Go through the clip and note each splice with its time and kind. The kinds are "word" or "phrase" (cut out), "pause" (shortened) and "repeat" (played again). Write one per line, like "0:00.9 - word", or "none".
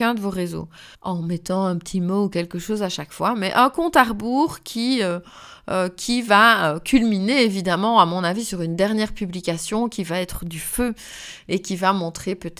0:00.9 - pause

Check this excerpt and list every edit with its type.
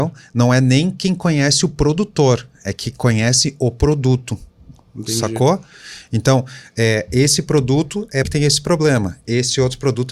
0:08.2 - phrase

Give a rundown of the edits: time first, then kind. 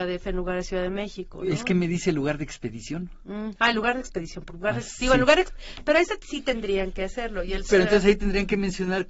0:07.7 - word

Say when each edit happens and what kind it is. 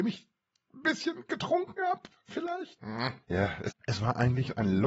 0:03.2 - pause
0:03.7 - phrase

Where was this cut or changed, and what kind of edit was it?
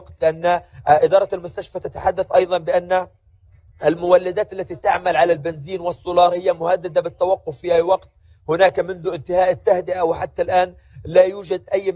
none

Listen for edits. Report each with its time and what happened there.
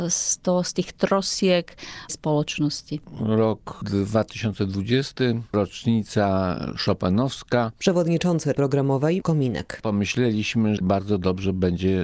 0:02.1 - word
0:08.5 - word
0:09.2 - word
0:10.8 - word

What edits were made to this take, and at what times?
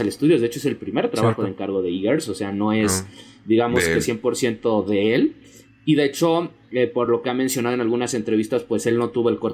none

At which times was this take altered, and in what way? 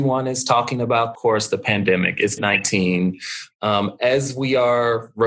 0:01.1 - phrase
0:02.4 - word

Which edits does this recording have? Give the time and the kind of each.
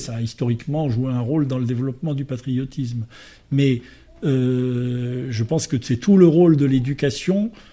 none

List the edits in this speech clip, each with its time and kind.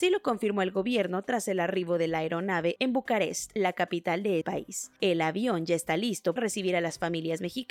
0:04.4 - word
0:06.4 - word

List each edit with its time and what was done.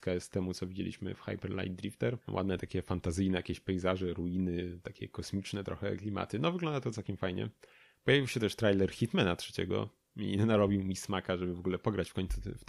0:02.2 - pause

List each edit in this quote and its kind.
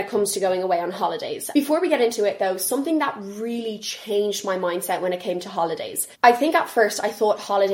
0:06.1 - pause

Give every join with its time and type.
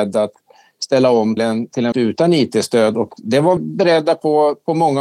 0:01.4 - word
0:01.9 - word
0:03.6 - word

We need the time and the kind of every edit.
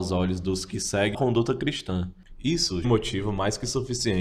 0:01.1 - phrase
0:02.8 - phrase

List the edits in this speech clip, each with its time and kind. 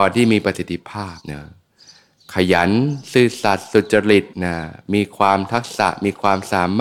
0:01.2 - pause
0:04.3 - pause

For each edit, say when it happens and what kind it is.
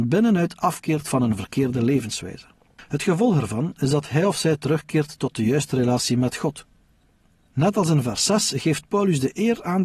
0:02.6 - pause

